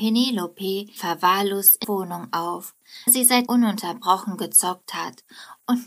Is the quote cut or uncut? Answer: cut